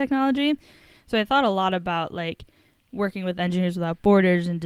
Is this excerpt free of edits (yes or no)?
yes